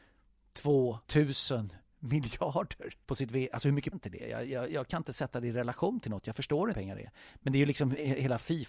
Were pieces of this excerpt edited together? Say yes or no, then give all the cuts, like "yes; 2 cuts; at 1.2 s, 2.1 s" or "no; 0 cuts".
yes; 4 cuts; at 1.0 s, 3.0 s, 3.9 s, 6.7 s